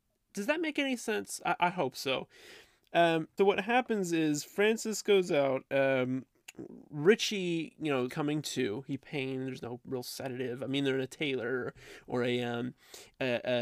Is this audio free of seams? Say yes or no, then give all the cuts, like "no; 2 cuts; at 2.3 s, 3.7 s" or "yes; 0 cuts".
no; 3 cuts; at 3.4 s, 8.1 s, 9.0 s